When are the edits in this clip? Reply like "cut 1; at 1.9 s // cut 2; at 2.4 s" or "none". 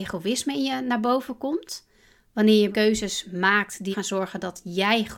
cut 1; at 2.7 s // cut 2; at 3.9 s